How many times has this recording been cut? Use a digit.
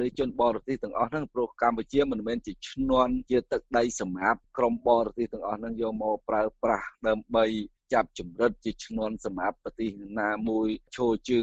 0